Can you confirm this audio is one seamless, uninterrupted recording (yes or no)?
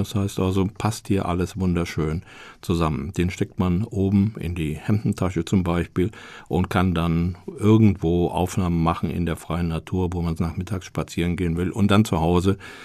no